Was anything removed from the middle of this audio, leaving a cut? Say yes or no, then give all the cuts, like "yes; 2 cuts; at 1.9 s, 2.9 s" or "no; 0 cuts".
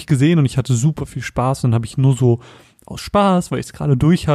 no; 0 cuts